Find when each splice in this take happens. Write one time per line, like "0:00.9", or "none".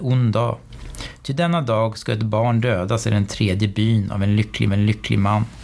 0:04.7

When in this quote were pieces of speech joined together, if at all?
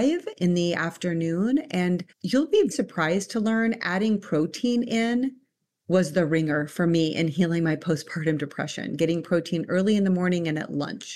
0:02.1
0:02.7

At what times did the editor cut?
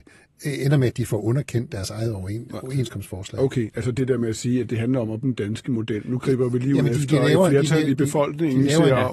0:05.2

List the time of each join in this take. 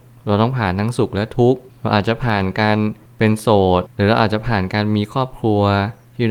none

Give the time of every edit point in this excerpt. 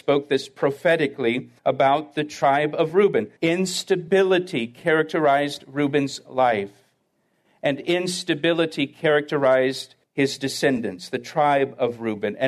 0:01.6
0:03.4
0:10.0

